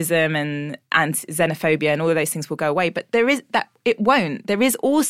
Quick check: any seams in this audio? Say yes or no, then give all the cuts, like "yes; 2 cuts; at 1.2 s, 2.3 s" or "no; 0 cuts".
no; 0 cuts